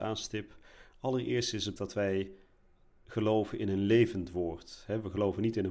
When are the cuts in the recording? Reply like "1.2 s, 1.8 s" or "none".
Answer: 1.8 s